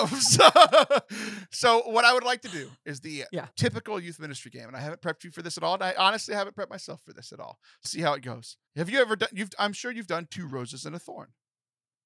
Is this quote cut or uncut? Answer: cut